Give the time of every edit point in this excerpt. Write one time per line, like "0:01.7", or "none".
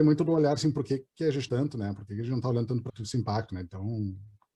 0:01.5
0:02.9